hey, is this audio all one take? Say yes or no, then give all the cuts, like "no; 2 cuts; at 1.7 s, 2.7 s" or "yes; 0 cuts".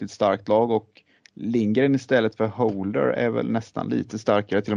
no; 1 cut; at 1.2 s